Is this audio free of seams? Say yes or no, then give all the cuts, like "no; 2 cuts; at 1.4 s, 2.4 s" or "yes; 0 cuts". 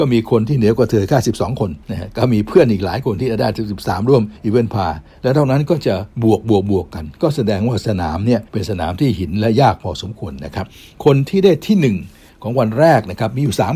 no; 4 cuts; at 1.8 s, 4.4 s, 6.1 s, 8.5 s